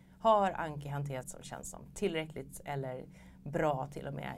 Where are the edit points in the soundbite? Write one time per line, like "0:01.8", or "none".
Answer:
0:01.2